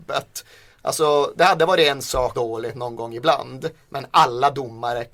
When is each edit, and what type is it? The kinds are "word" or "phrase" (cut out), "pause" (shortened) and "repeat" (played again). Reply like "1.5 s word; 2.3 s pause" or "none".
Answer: 2.3 s phrase